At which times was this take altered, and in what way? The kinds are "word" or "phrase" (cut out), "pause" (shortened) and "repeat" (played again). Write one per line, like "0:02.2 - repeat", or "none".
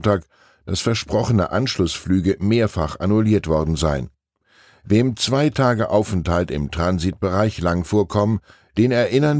none